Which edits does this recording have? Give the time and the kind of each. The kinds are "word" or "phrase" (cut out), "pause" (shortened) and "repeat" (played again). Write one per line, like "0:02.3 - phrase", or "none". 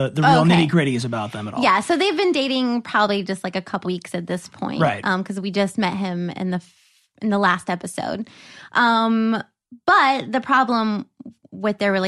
0:03.8 - word